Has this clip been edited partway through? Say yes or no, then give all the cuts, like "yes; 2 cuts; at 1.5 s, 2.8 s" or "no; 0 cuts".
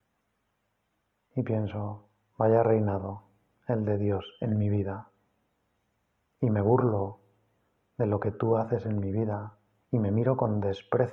no; 0 cuts